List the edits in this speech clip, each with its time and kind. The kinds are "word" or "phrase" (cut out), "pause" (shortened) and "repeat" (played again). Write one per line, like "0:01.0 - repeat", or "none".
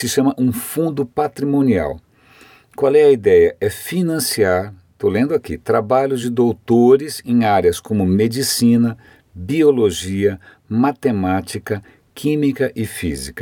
none

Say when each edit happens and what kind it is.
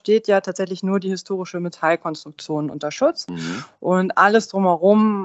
none

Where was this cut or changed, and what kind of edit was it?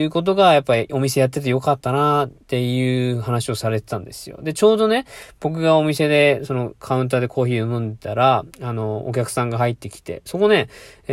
0:02.4 - pause
0:08.5 - pause

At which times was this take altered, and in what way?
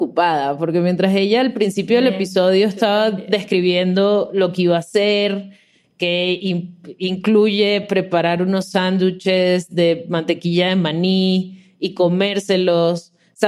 none

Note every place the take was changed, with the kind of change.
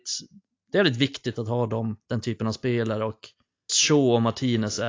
0:02.0 - pause
0:03.7 - word

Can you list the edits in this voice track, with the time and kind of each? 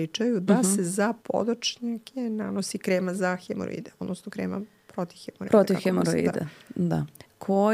0:01.2 - pause

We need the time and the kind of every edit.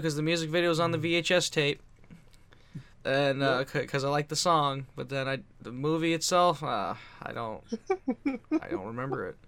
0:02.9 - pause
0:05.5 - pause

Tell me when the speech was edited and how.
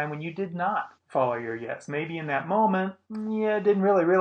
0:01.0 - pause
0:03.0 - pause

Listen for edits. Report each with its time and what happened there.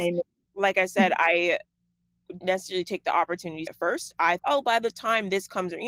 0:02.4 - word
0:03.7 - word
0:04.4 - word

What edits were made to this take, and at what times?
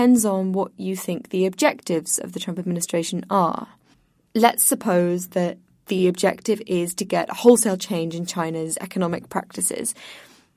none

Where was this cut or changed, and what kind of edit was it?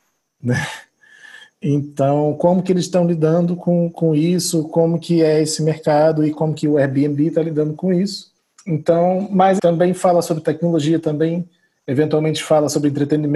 0:08.4 - pause
0:09.6 - word

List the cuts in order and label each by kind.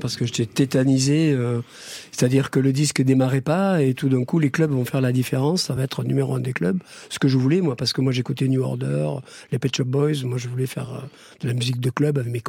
none

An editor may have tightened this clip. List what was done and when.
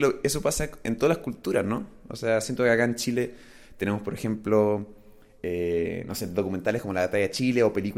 none

